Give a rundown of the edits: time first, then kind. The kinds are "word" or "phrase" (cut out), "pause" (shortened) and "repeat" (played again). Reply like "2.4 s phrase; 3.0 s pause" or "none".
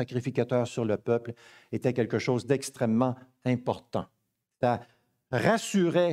none